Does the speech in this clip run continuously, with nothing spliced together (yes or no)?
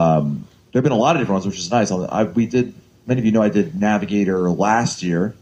yes